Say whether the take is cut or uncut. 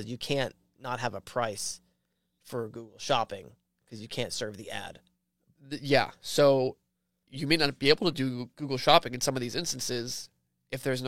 uncut